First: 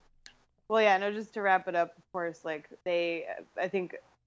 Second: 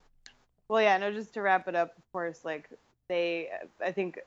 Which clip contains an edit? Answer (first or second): first